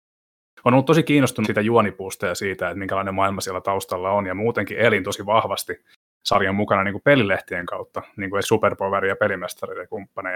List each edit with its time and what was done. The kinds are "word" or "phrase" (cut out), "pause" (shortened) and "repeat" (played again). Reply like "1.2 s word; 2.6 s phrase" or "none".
1.4 s word; 8.4 s word